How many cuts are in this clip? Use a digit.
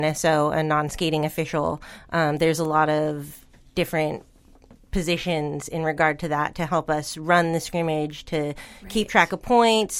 0